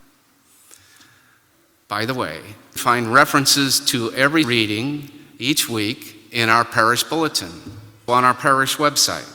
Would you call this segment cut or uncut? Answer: cut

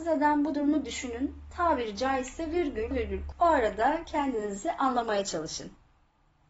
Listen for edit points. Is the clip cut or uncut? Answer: cut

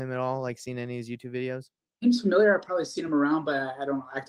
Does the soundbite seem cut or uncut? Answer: uncut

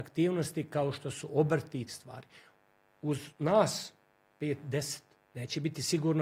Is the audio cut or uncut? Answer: cut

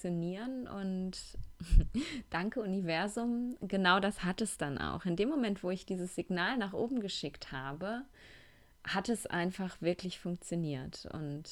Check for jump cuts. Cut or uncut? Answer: uncut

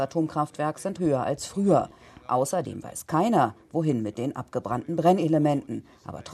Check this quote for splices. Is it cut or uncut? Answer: cut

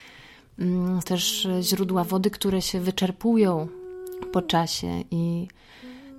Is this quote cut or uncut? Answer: cut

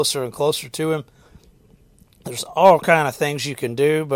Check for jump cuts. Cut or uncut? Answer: uncut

